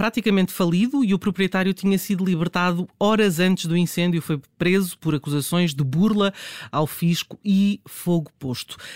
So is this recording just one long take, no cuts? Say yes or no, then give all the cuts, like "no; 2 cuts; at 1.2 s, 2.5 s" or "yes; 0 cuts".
yes; 0 cuts